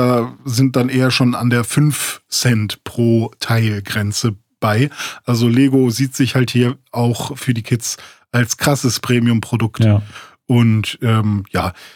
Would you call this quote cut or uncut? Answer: uncut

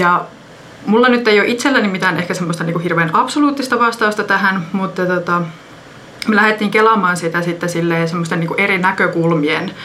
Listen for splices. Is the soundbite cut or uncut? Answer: uncut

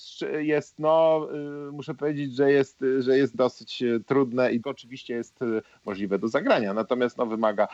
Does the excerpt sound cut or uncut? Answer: cut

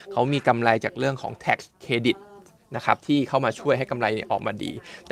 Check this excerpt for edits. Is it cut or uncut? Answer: uncut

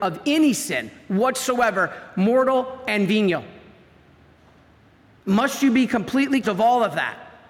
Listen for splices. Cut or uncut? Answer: cut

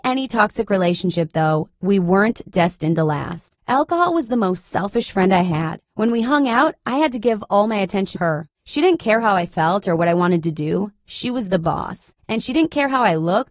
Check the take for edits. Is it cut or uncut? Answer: cut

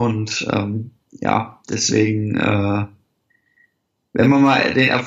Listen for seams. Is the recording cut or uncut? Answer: uncut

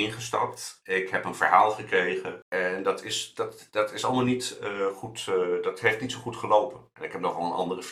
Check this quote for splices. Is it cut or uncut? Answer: uncut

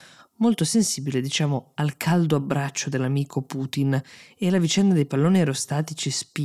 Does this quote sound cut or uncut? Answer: uncut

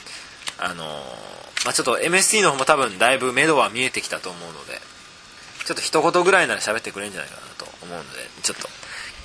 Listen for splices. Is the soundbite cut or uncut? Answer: uncut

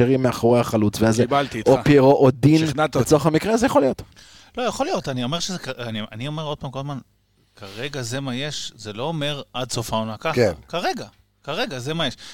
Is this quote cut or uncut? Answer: uncut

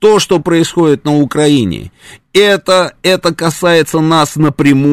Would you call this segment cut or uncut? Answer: uncut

